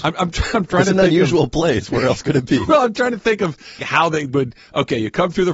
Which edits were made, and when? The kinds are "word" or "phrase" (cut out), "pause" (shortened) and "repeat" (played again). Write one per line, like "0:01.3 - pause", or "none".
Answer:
0:03.8 - word